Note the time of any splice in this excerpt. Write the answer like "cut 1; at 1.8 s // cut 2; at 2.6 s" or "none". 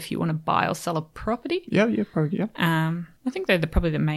cut 1; at 3.2 s